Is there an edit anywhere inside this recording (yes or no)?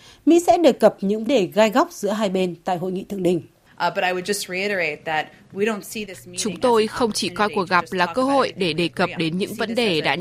yes